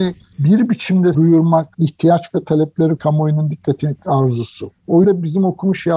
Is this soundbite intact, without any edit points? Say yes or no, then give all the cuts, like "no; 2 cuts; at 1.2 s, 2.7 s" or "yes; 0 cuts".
no; 4 cuts; at 1.1 s, 3.0 s, 4.0 s, 5.0 s